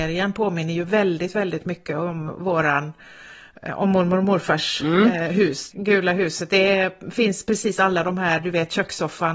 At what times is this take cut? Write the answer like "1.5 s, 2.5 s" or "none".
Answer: 5.7 s